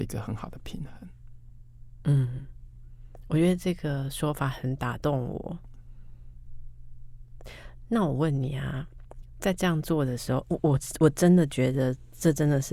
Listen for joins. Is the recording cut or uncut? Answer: uncut